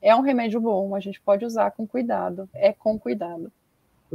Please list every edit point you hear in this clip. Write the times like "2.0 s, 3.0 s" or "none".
2.5 s